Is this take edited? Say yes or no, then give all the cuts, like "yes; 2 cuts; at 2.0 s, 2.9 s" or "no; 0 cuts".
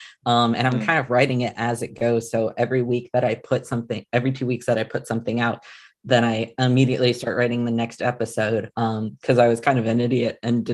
no; 0 cuts